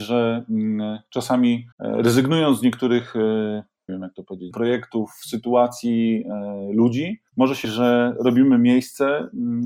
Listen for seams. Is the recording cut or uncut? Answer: cut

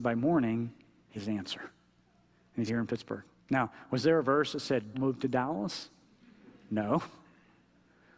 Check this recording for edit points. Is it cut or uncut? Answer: cut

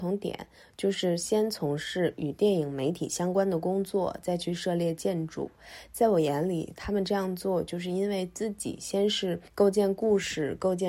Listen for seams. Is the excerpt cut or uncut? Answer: cut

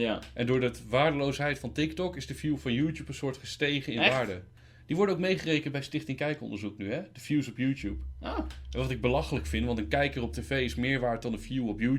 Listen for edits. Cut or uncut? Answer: uncut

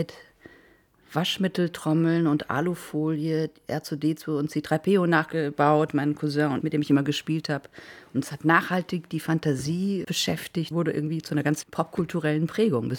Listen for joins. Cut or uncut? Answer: cut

